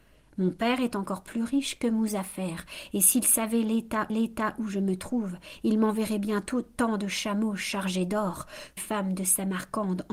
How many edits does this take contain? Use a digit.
2